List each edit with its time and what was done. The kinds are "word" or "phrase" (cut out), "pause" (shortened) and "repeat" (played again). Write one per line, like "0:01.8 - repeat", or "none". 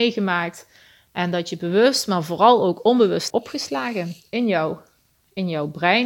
0:03.3 - word